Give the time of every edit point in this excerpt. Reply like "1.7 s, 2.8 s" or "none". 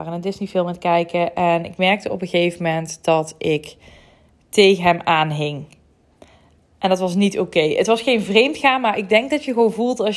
none